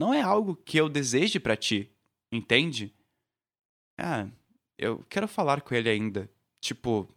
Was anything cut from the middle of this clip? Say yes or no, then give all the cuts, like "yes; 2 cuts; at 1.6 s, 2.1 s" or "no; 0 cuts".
no; 0 cuts